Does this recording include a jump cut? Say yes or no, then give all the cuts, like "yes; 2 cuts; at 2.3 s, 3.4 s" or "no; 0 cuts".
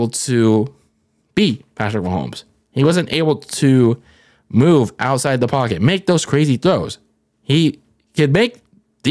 no; 0 cuts